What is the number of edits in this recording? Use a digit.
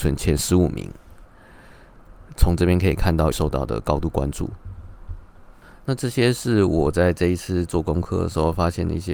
1